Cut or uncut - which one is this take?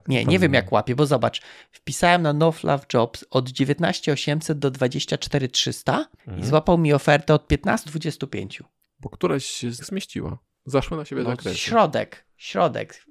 cut